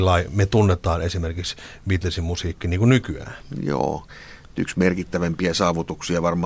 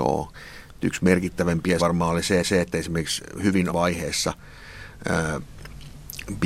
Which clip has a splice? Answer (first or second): second